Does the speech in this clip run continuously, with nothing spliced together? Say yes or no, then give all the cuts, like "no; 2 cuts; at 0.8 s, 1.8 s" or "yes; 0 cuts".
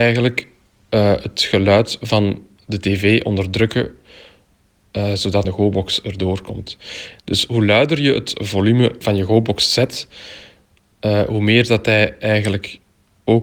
no; 1 cut; at 5.4 s